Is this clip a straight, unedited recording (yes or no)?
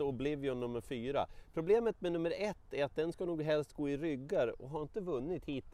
yes